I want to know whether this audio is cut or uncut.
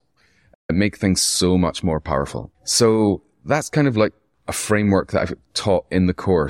cut